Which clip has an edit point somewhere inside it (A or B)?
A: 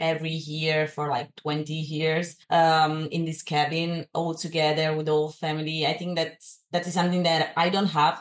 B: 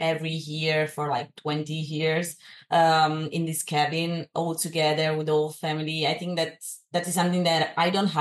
A